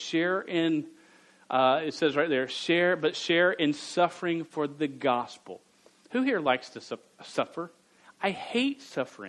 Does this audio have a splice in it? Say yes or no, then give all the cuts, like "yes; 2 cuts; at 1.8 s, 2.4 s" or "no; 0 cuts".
no; 0 cuts